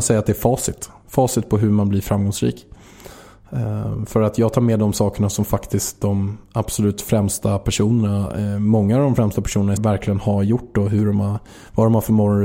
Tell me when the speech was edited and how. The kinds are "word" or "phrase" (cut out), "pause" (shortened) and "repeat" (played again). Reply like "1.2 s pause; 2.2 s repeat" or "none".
9.8 s word